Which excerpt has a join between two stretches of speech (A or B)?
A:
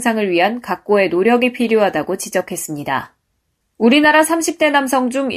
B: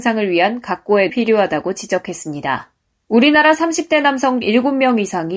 B